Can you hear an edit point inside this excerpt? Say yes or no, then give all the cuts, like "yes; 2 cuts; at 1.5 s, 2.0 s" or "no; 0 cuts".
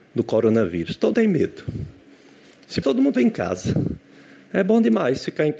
yes; 3 cuts; at 1.1 s, 2.8 s, 3.1 s